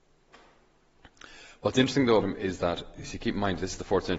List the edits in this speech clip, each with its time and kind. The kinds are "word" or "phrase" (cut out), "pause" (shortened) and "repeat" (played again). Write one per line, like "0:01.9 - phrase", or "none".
0:02.2 - word